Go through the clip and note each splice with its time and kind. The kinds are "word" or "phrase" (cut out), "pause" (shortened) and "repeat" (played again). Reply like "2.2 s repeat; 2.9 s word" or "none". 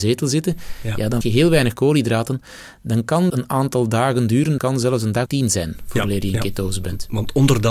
1.2 s word; 3.3 s word; 4.6 s word; 5.3 s word